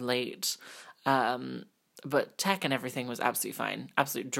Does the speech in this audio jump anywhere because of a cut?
no; 0 cuts

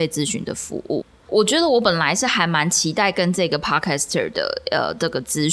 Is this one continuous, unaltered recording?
yes; 0 cuts

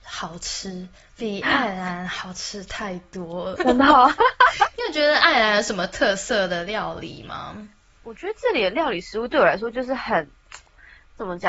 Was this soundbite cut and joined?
yes; 1 cut; at 3.6 s

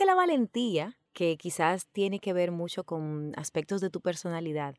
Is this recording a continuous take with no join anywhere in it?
no; 1 cut; at 1.1 s

